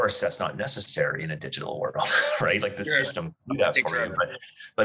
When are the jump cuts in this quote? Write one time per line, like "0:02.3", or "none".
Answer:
none